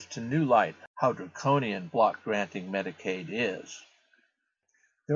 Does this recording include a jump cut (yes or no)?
no